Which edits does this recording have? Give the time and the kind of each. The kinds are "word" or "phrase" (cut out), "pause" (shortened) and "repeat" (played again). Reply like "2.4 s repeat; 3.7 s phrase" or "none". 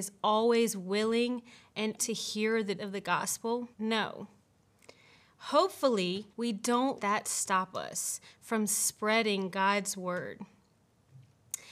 2.0 s word; 2.8 s word; 3.7 s pause; 6.3 s pause; 7.0 s word